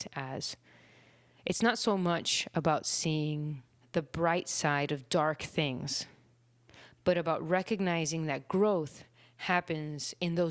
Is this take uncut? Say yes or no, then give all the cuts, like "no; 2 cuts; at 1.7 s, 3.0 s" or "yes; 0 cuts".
no; 1 cut; at 3.8 s